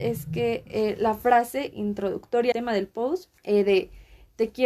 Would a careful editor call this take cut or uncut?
cut